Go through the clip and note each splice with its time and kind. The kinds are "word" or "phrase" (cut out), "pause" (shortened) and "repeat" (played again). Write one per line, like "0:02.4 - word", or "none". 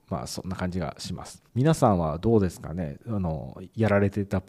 0:01.5 - pause